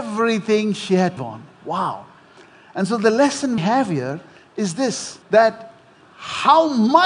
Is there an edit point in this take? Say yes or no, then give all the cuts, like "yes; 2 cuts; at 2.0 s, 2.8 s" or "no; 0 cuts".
yes; 3 cuts; at 1.2 s, 3.6 s, 5.2 s